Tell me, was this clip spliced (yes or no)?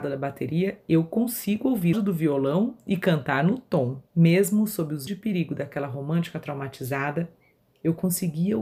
yes